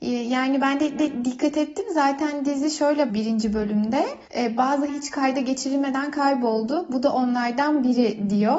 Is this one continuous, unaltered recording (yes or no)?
no